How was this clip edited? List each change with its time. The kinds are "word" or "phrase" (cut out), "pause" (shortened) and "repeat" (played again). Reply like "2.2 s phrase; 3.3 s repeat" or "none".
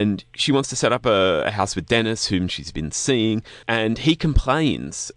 3.6 s pause